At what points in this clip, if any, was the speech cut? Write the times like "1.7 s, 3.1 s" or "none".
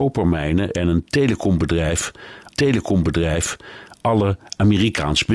2.5 s